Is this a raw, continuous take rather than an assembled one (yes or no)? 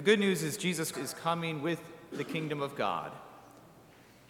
no